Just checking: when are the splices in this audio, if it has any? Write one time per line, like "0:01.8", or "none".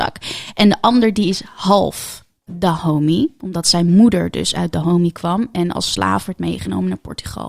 0:02.5